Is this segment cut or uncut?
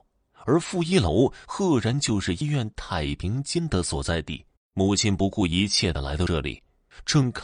cut